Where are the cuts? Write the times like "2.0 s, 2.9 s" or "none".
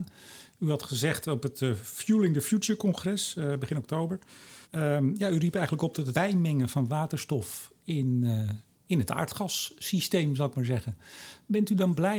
4.6 s, 6.1 s

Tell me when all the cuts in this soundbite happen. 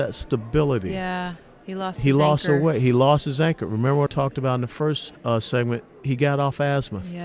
4.1 s, 5.1 s

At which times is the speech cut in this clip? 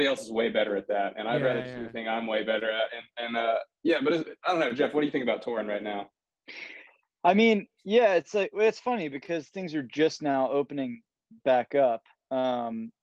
3.7 s

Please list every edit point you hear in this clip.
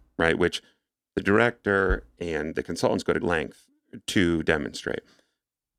3.2 s

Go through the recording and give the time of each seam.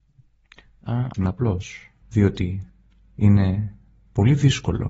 1.1 s, 2.0 s

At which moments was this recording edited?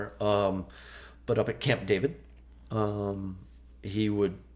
none

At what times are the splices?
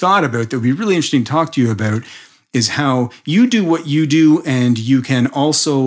none

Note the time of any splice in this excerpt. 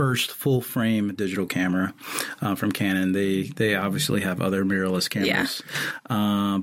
none

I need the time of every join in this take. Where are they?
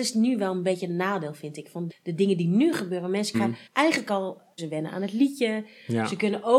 1.9 s, 3.3 s, 3.7 s, 4.6 s

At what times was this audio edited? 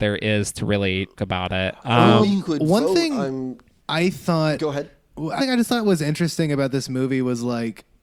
1.2 s, 5.4 s

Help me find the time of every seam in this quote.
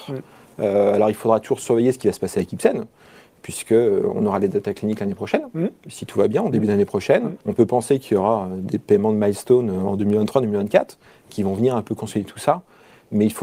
7.4 s

